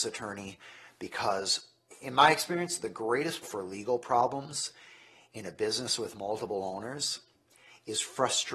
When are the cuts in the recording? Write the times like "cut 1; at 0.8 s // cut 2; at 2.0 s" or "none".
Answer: cut 1; at 3.4 s